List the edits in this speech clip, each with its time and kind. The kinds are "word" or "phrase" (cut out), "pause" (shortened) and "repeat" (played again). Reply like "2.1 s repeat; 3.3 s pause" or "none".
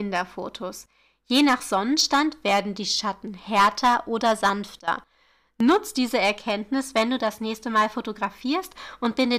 none

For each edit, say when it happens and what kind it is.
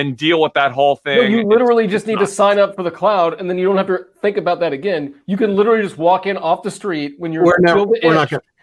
none

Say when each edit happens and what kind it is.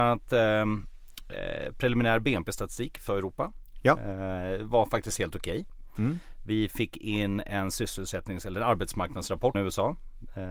3.1 s word; 9.5 s word

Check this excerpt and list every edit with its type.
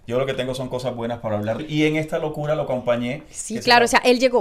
1.6 s word

